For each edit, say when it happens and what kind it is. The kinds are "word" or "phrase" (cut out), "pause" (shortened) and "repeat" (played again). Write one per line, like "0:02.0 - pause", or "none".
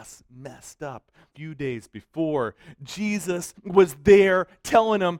0:01.3 - word
0:03.6 - pause

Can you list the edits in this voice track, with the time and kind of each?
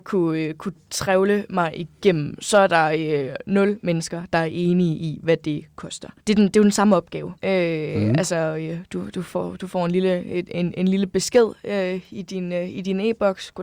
0:06.2 - pause
0:07.4 - pause

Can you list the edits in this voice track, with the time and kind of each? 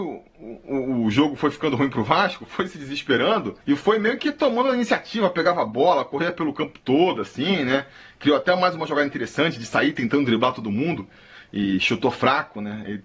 0:03.6 - pause

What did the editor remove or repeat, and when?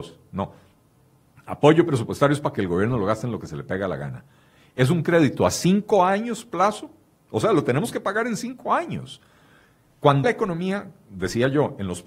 0:10.2 - word

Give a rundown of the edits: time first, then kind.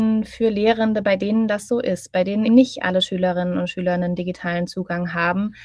0:02.5 - word

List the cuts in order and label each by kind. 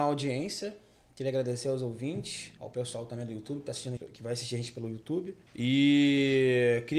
0:02.6 - pause
0:04.0 - word
0:05.5 - pause

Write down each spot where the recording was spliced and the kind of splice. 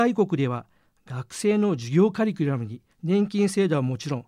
0:02.9 - pause

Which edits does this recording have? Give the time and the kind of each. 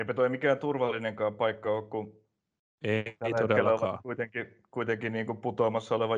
none

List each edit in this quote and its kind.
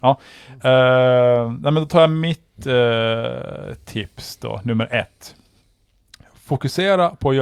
none

